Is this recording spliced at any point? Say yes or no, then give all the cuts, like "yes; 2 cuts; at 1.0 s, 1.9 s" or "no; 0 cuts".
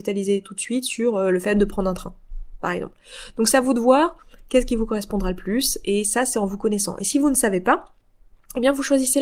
no; 0 cuts